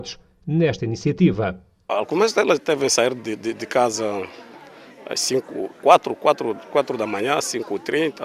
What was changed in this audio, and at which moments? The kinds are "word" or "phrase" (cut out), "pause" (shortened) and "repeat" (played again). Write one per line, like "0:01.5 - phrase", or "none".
none

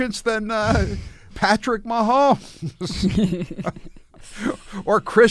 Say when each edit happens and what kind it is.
0:01.3 - word

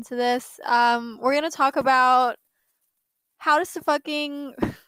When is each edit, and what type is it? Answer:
none

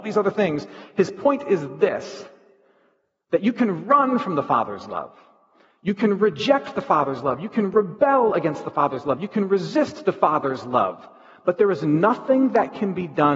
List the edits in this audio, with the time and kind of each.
none

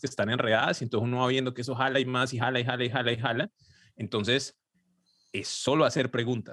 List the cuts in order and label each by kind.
none

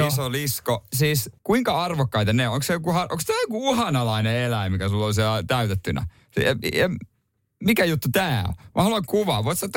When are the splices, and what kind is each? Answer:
0:01.4 - pause

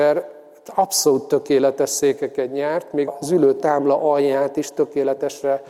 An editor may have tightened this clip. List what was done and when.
0:03.1 - word

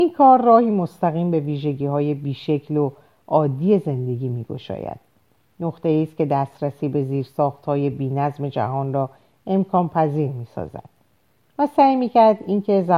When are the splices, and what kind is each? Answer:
none

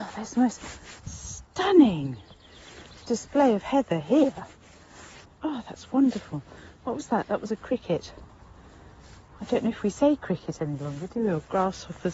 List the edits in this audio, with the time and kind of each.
0:01.0 - pause

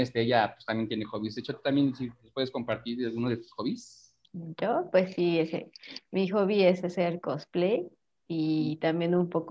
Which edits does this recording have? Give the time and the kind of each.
0:04.2 - pause

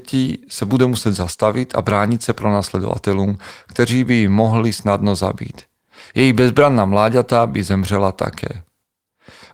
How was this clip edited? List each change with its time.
none

